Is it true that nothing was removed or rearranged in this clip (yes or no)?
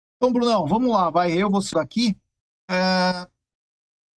no